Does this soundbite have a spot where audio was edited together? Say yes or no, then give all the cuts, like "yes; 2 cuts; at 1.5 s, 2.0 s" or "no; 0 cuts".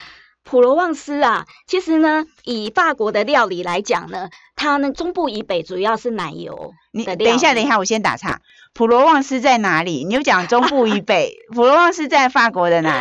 no; 0 cuts